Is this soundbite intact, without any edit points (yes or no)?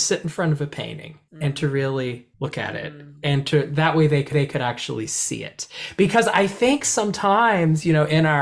no